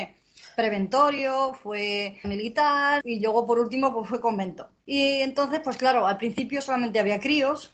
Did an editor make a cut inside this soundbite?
yes; 3 cuts; at 2.2 s, 3.0 s, 4.8 s

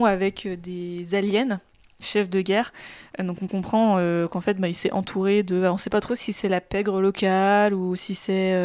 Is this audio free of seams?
yes; 0 cuts

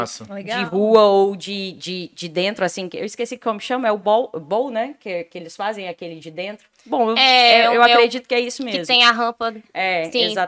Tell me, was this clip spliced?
no; 0 cuts

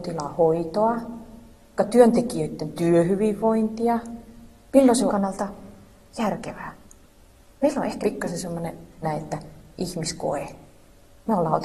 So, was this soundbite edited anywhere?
yes; 4 cuts; at 1.8 s, 5.1 s, 8.0 s, 9.0 s

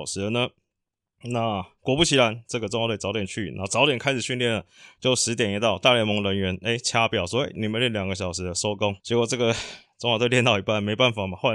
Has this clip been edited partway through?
yes; 1 cut; at 9.0 s

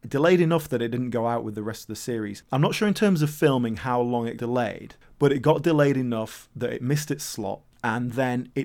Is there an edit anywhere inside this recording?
yes; 1 cut; at 4.4 s

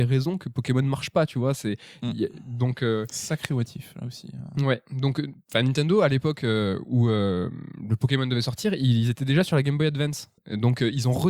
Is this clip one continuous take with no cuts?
no; 1 cut; at 10.4 s

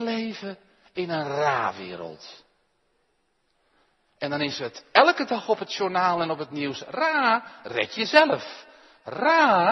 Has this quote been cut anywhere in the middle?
no; 0 cuts

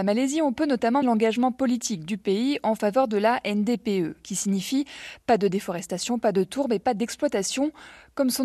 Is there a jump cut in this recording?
yes; 1 cut; at 1.0 s

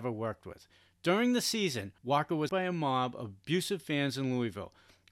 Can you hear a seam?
yes; 2 cuts; at 2.0 s, 2.5 s

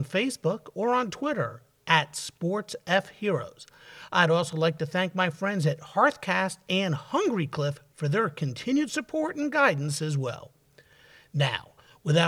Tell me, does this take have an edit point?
no; 0 cuts

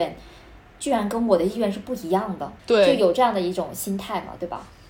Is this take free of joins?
no; 1 cut; at 2.6 s

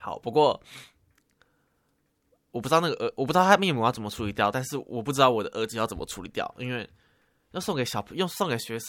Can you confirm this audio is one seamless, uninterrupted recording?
yes; 0 cuts

